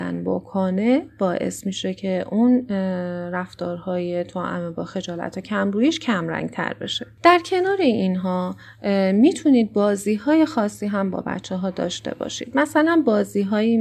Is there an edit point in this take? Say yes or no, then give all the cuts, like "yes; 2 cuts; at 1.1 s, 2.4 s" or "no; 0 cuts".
no; 0 cuts